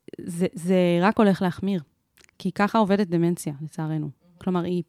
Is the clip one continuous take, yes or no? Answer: yes